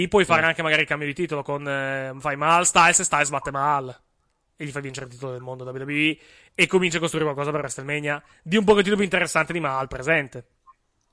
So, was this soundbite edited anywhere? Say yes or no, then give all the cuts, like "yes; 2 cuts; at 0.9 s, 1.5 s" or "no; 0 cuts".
no; 0 cuts